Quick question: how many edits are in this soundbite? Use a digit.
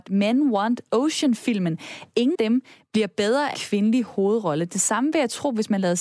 2